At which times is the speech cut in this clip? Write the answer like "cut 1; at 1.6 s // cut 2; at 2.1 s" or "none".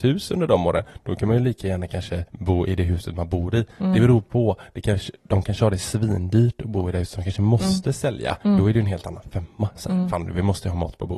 cut 1; at 2.3 s // cut 2; at 8.4 s